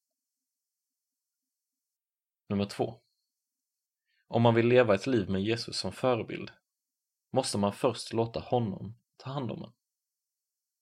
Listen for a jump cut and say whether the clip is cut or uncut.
uncut